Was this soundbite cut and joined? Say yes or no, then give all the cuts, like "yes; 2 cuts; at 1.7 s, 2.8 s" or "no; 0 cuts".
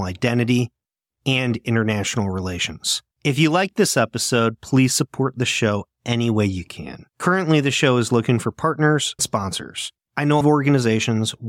yes; 5 cuts; at 3.1 s, 7.1 s, 9.2 s, 10.1 s, 10.4 s